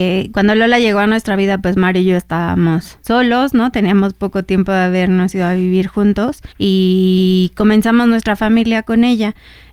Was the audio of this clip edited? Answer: yes; 2 cuts; at 3.0 s, 6.5 s

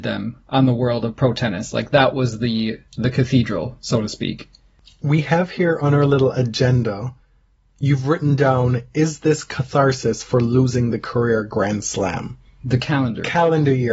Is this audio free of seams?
yes; 0 cuts

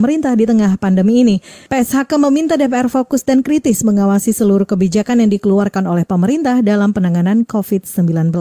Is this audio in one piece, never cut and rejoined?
yes; 0 cuts

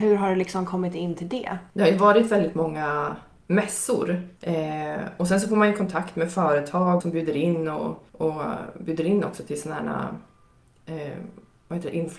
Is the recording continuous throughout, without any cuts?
no; 4 cuts; at 1.7 s, 4.4 s, 7.0 s, 8.1 s

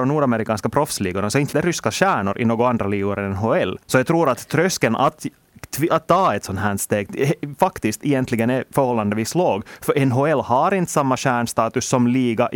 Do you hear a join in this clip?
yes; 3 cuts; at 1.5 s, 3.8 s, 5.9 s

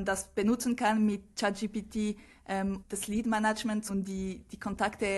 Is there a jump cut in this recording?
yes; 2 cuts; at 2.8 s, 3.9 s

